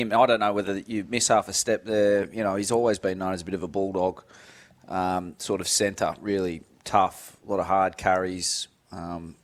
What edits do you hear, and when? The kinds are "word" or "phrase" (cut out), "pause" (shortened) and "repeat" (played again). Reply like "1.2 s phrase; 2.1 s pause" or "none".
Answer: none